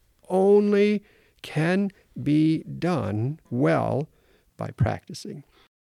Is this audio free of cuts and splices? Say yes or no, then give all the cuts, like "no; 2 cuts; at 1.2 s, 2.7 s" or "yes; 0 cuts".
no; 1 cut; at 3.5 s